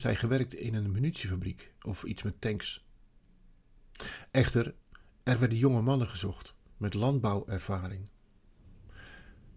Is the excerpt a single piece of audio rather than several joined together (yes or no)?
yes